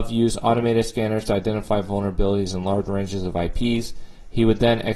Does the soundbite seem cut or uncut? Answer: uncut